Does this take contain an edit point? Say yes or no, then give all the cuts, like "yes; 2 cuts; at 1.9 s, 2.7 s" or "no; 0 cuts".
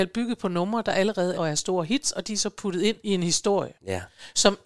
yes; 3 cuts; at 1.3 s, 3.0 s, 3.7 s